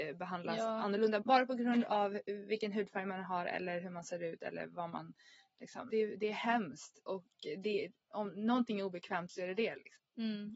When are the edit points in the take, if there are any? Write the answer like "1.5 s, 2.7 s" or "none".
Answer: 1.2 s, 5.9 s